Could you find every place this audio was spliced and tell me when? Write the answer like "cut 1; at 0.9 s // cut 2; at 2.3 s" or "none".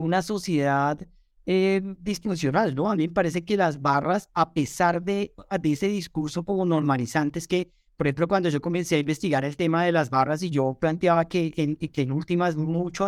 none